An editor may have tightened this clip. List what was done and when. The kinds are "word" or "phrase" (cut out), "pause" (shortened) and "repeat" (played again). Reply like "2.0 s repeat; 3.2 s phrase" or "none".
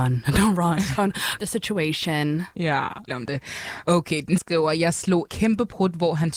1.4 s word; 3.1 s word; 4.4 s word; 5.3 s word